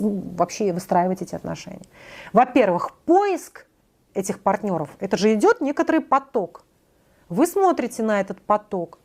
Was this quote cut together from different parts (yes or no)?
no